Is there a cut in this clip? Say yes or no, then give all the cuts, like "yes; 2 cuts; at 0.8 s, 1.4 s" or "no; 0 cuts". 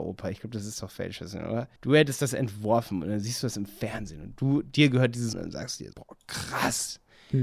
yes; 3 cuts; at 1.8 s, 5.3 s, 5.9 s